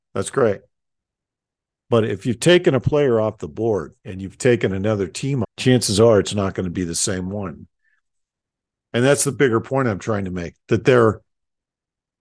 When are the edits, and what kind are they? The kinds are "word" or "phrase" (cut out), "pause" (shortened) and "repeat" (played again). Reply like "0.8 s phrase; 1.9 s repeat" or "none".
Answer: 4.0 s pause; 5.4 s phrase